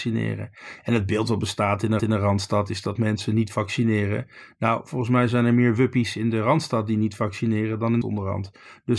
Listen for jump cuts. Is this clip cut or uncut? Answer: cut